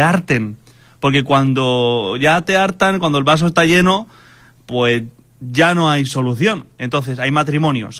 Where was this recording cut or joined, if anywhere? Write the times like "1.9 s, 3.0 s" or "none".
none